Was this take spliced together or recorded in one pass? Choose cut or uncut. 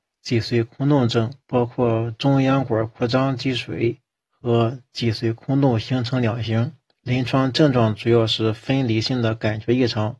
cut